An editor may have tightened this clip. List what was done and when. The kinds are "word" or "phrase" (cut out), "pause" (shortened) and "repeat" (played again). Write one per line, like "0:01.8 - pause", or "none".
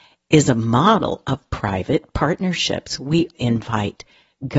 0:01.5 - word
0:03.3 - word